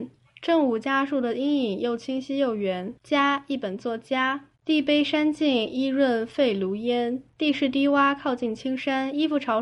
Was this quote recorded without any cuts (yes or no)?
no